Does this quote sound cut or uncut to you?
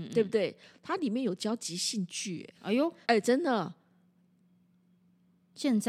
cut